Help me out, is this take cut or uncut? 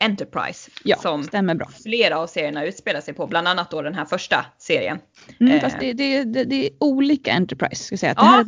uncut